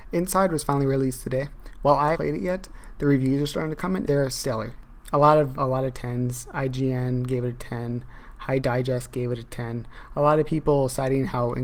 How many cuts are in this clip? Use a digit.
4